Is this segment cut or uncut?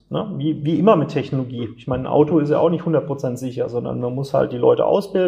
uncut